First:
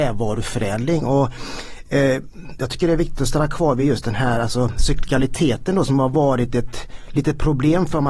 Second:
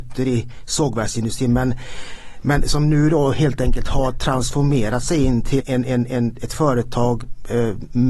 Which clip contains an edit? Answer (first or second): second